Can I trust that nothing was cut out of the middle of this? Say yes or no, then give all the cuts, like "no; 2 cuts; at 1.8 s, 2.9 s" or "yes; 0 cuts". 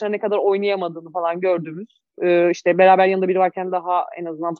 yes; 0 cuts